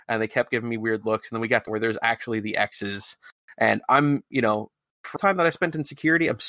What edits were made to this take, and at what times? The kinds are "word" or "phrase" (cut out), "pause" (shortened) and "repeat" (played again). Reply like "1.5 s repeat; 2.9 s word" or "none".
1.7 s phrase; 5.2 s phrase